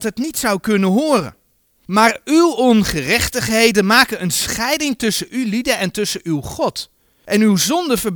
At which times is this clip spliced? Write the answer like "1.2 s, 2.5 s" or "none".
1.6 s